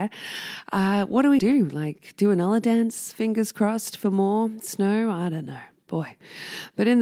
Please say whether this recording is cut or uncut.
cut